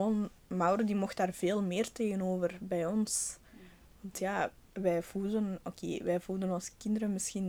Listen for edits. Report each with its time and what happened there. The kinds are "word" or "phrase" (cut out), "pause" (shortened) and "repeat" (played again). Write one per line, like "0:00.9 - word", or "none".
0:04.6 - word